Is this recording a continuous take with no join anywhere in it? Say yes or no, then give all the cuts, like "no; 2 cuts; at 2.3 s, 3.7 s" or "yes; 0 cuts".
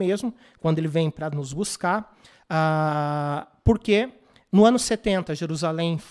yes; 0 cuts